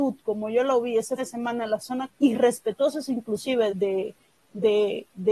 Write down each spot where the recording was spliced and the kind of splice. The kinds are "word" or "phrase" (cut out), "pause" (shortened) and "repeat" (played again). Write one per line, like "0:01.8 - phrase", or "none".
0:01.2 - word
0:02.1 - word
0:03.7 - word